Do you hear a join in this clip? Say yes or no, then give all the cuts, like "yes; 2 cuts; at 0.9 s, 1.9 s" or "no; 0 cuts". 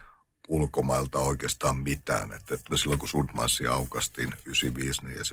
yes; 1 cut; at 2.7 s